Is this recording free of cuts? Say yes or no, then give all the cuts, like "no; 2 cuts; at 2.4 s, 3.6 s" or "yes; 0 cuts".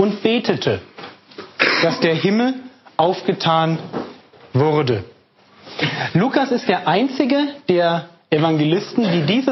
yes; 0 cuts